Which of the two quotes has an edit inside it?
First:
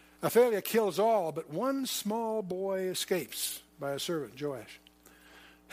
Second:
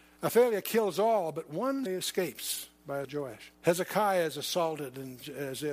second; 3 cuts; at 1.9 s, 3.0 s, 3.5 s

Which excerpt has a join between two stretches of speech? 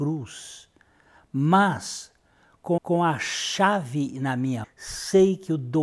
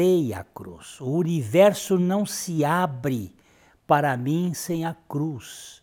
first; 2 cuts; at 2.8 s, 4.6 s

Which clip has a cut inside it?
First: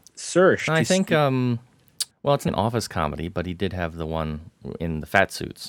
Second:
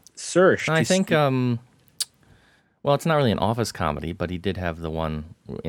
first; 2 cuts; at 2.1 s, 2.5 s

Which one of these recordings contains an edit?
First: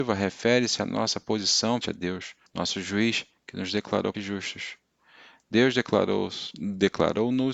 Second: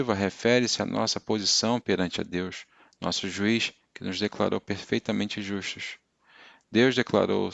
first; 3 cuts; at 1.8 s, 2.5 s, 4.1 s

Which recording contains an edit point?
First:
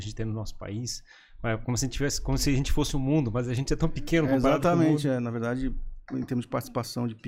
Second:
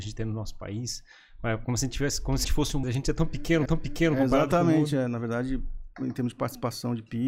second; 3 cuts; at 2.4 s, 2.8 s, 3.7 s

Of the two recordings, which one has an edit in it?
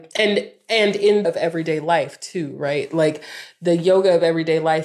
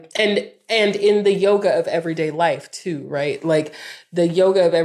first; 1 cut; at 1.2 s

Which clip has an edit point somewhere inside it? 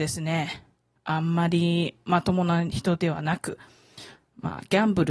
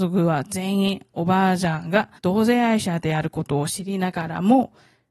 second; 1 cut; at 2.2 s

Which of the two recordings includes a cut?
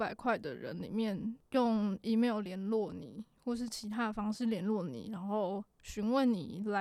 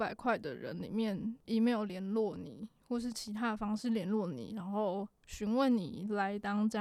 second; 1 cut; at 1.5 s

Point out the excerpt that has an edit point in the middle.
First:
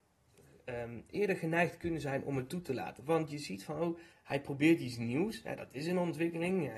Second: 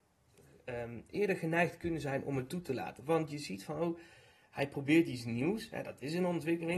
first; 1 cut; at 4.1 s

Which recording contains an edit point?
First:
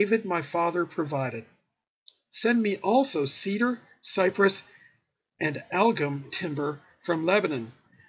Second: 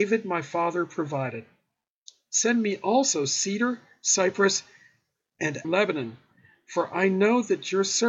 second; 1 cut; at 5.6 s

